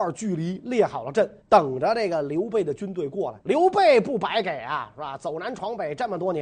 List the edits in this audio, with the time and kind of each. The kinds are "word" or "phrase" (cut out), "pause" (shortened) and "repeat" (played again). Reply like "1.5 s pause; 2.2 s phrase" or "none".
1.4 s pause; 3.4 s pause